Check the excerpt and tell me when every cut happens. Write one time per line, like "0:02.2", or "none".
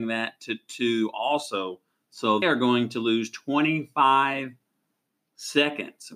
0:02.4